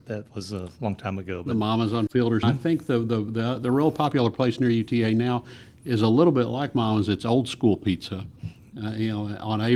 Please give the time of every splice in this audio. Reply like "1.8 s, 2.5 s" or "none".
2.4 s